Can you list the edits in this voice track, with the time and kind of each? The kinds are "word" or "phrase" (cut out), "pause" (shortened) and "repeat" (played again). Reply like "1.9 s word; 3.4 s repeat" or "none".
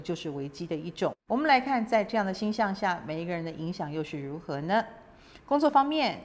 1.2 s pause